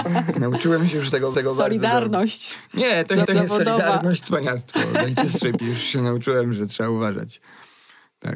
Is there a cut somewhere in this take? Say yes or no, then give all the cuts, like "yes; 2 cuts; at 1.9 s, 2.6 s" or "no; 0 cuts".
yes; 4 cuts; at 1.3 s, 3.2 s, 4.2 s, 5.6 s